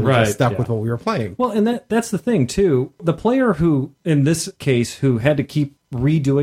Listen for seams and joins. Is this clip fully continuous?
yes; 0 cuts

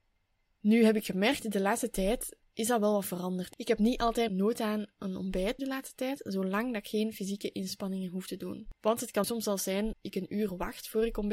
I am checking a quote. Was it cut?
yes; 5 cuts; at 2.5 s, 4.3 s, 5.6 s, 9.2 s, 9.9 s

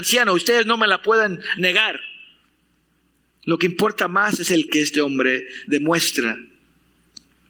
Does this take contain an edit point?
yes; 1 cut; at 4.7 s

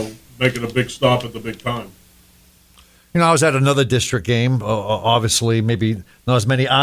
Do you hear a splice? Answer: no; 0 cuts

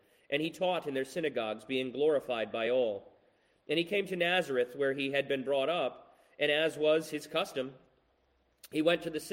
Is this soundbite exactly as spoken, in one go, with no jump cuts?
yes; 0 cuts

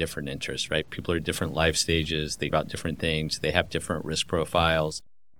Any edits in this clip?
yes; 1 cut; at 2.5 s

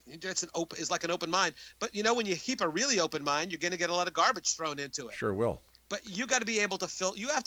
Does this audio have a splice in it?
no; 0 cuts

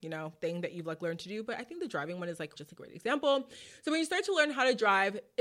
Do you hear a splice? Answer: yes; 1 cut; at 2.6 s

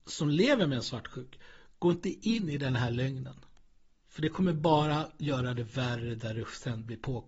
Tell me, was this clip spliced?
no; 0 cuts

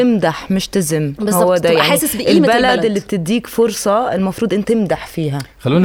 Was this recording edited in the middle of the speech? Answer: yes; 1 cut; at 4.6 s

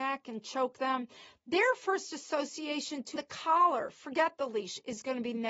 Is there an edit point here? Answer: yes; 1 cut; at 3.2 s

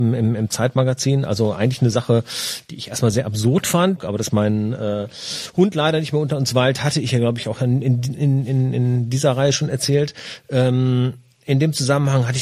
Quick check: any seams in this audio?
no; 0 cuts

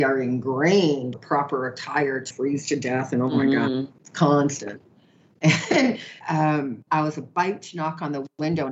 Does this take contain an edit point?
yes; 5 cuts; at 1.1 s, 2.3 s, 4.0 s, 6.2 s, 6.9 s

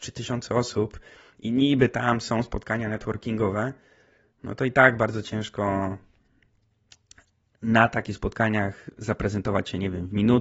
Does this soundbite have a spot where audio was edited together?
no; 0 cuts

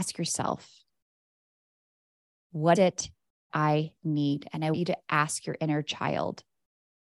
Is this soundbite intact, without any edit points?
no; 3 cuts; at 2.8 s, 3.5 s, 4.7 s

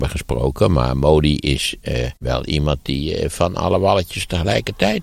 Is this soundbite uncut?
no; 1 cut; at 2.2 s

